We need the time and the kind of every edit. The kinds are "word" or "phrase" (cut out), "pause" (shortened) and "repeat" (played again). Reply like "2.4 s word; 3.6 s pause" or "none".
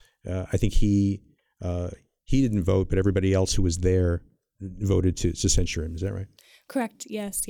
none